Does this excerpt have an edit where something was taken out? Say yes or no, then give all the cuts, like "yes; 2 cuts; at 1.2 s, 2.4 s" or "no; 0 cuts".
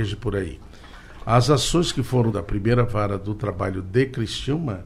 yes; 1 cut; at 2.3 s